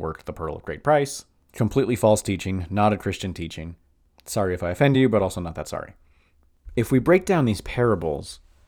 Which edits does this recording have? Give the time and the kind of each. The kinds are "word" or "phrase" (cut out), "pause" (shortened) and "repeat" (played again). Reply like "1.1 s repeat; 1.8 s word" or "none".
none